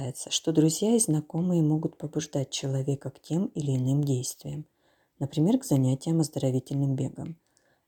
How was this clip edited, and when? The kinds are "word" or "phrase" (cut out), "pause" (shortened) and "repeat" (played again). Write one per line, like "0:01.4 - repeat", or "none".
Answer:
none